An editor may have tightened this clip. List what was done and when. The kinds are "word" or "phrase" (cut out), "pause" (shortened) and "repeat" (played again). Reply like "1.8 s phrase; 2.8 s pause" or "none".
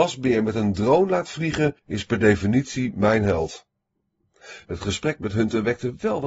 1.8 s pause